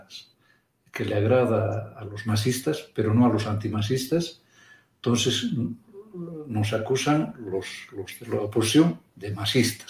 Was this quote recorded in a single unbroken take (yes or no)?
yes